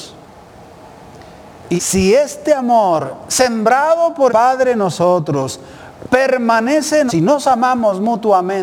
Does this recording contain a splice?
yes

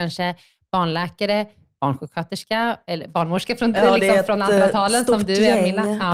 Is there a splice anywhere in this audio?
no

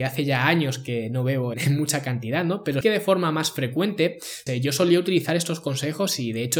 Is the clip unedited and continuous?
no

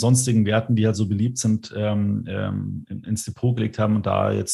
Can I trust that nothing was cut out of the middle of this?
yes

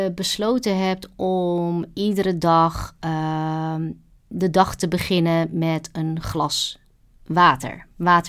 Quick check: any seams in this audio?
no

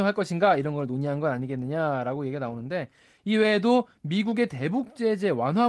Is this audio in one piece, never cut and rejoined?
yes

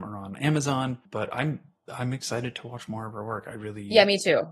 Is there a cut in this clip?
no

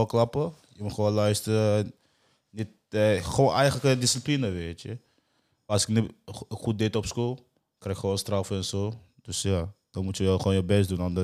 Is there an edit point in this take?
no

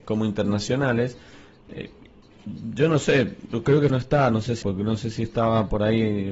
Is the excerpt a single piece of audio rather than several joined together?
no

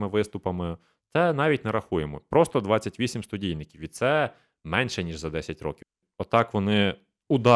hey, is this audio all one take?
yes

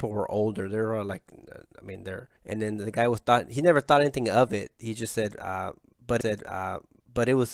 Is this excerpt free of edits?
no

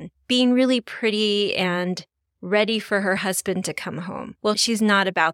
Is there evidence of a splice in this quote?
no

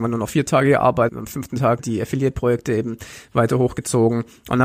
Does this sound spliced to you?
yes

